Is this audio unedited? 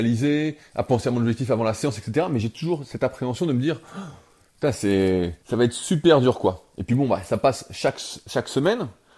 no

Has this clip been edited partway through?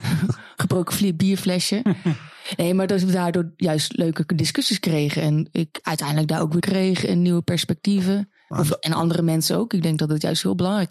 yes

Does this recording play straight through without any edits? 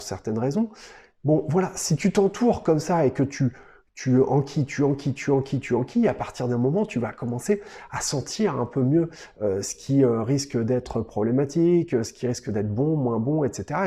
yes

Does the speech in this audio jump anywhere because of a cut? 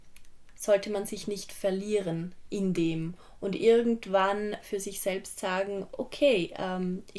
no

